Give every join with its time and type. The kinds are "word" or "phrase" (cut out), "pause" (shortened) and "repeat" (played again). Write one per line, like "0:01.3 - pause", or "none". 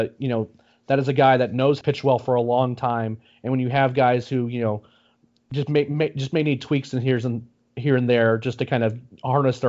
0:01.8 - phrase